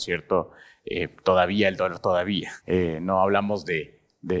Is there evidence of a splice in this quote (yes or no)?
yes